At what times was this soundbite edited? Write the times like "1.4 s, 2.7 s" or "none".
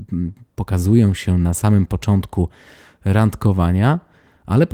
none